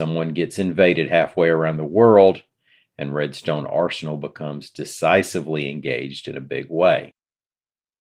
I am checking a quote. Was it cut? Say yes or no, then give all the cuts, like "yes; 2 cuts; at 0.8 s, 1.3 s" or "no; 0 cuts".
no; 0 cuts